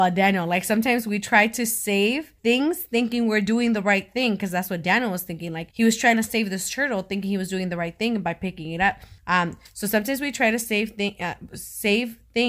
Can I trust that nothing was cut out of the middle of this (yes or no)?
no